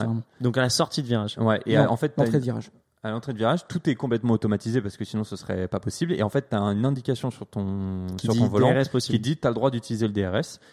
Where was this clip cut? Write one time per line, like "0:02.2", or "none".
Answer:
none